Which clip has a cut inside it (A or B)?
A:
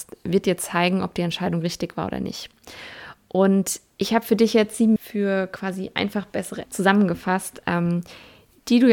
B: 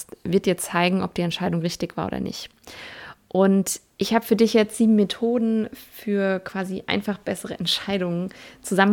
A